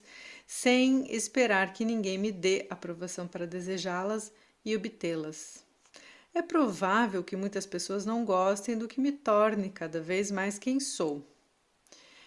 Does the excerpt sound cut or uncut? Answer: uncut